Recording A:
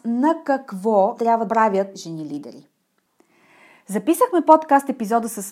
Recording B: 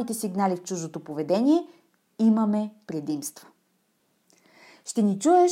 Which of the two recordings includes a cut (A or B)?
A